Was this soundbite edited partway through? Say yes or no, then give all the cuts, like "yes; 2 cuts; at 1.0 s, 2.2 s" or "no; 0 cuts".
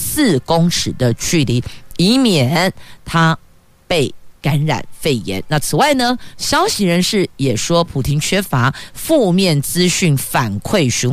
yes; 1 cut; at 4.4 s